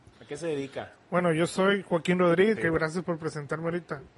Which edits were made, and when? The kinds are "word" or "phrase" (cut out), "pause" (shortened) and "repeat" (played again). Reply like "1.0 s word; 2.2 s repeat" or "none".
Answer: 2.6 s word